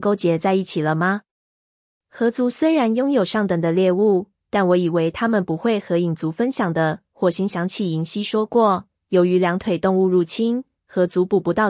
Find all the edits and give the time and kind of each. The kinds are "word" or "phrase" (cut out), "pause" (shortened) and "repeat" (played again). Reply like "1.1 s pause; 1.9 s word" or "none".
none